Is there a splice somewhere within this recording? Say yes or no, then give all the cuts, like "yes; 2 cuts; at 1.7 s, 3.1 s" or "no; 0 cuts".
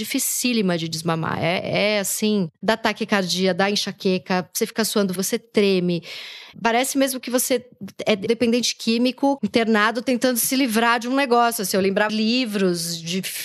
yes; 6 cuts; at 2.5 s, 5.2 s, 6.5 s, 8.3 s, 9.4 s, 12.1 s